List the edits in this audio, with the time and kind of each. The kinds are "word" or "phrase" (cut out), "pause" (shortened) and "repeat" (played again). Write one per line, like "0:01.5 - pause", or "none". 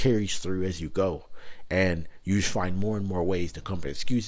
none